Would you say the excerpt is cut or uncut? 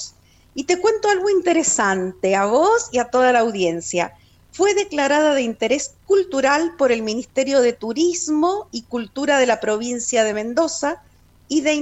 uncut